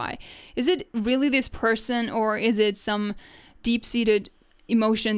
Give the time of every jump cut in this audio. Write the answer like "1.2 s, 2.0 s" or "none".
none